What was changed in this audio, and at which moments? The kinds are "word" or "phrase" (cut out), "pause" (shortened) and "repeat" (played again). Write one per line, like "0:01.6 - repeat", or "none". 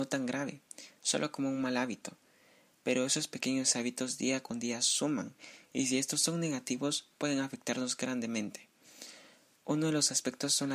none